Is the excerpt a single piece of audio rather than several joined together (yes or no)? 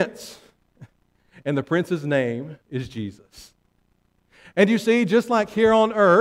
no